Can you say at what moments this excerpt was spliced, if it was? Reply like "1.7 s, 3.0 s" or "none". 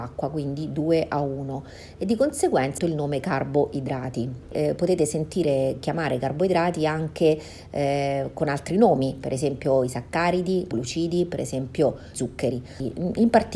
2.8 s, 10.7 s, 12.1 s